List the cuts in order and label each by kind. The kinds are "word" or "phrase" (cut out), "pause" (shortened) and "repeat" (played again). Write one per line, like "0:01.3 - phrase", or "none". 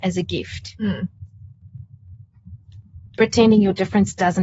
0:03.1 - pause